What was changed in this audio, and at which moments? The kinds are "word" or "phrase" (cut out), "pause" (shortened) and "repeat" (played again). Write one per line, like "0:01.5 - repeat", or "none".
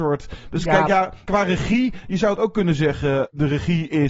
none